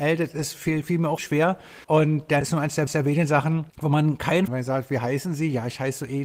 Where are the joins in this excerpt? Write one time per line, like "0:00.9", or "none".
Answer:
0:01.2
0:01.8
0:02.4
0:02.9
0:03.7
0:04.5